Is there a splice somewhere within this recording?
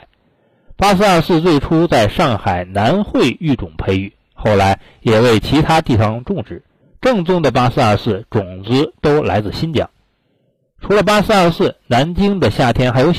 yes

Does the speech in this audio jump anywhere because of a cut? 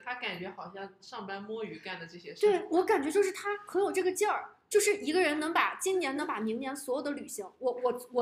no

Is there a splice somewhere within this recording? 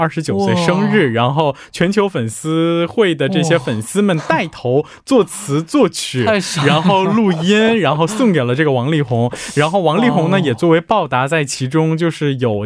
no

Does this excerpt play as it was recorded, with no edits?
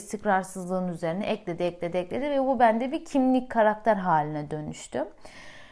yes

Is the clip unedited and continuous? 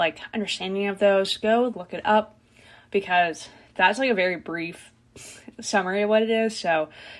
no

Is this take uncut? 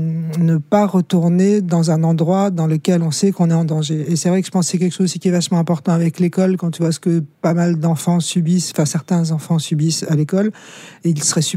yes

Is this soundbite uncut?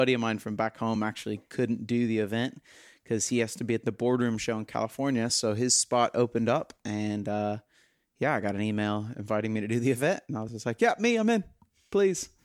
yes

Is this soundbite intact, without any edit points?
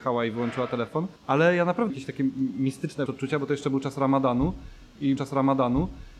no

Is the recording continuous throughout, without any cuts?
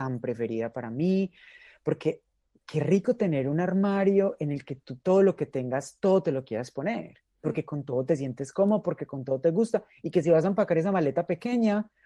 yes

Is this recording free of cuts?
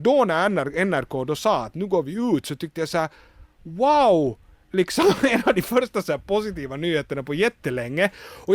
yes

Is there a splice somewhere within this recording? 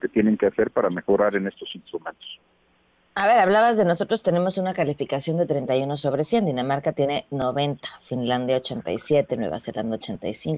no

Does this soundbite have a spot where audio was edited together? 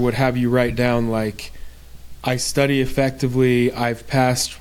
no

